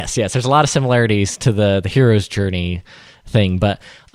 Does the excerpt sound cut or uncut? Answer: uncut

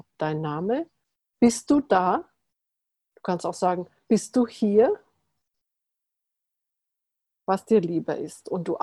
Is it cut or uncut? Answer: uncut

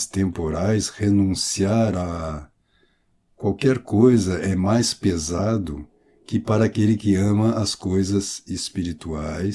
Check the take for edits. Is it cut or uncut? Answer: uncut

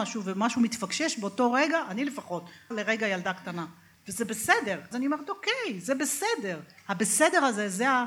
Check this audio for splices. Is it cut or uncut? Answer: cut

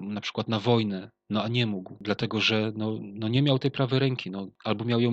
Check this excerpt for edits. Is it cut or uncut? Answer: uncut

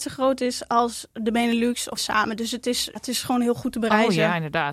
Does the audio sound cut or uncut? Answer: cut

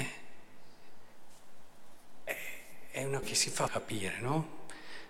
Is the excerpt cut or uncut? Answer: cut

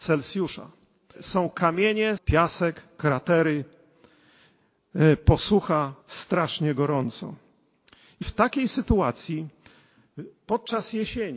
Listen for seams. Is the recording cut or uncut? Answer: cut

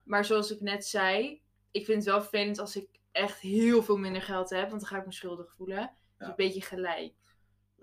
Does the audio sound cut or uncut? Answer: uncut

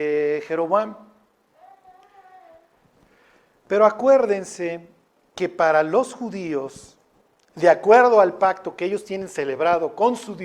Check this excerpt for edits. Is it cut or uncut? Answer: uncut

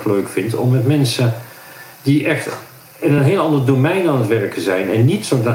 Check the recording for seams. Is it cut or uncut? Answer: uncut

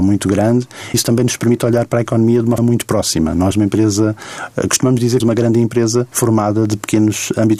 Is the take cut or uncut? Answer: cut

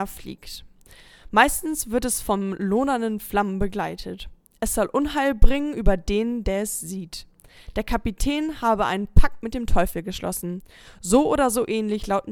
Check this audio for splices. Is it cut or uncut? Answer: uncut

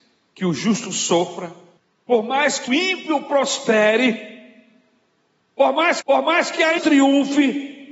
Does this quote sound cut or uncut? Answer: cut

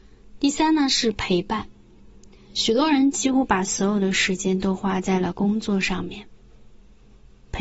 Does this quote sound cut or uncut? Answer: uncut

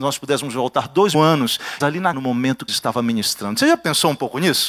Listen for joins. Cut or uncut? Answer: cut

